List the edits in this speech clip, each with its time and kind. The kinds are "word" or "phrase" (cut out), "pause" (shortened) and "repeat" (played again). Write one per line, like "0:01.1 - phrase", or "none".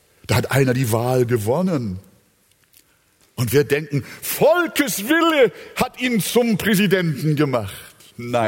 none